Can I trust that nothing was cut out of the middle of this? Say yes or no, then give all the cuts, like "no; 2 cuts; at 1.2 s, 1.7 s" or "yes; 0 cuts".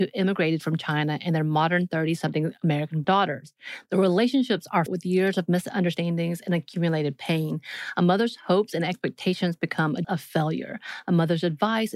no; 3 cuts; at 3.0 s, 4.9 s, 10.0 s